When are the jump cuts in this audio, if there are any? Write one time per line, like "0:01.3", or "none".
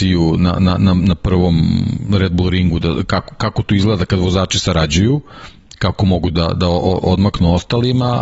none